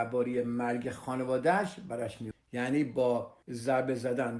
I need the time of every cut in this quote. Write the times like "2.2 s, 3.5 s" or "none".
none